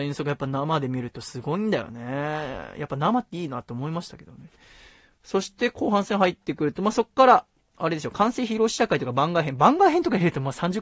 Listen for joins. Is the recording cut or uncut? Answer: uncut